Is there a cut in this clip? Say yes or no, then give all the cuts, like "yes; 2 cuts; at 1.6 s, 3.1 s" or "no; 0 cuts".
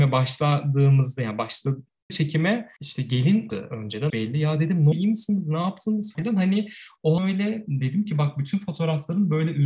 yes; 6 cuts; at 2.1 s, 3.5 s, 4.1 s, 4.9 s, 6.1 s, 7.2 s